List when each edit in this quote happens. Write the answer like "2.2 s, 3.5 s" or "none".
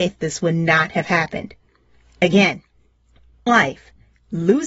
3.5 s